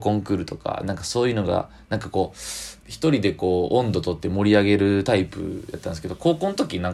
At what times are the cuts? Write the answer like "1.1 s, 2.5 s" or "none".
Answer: 2.8 s